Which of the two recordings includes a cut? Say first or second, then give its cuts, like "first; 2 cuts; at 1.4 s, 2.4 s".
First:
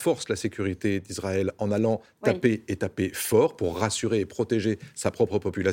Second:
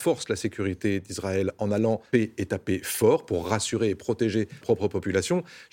second; 2 cuts; at 2.1 s, 4.6 s